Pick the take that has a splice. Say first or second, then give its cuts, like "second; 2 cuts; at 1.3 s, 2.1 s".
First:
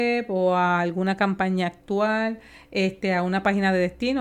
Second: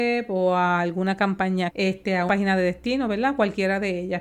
second; 2 cuts; at 1.7 s, 2.3 s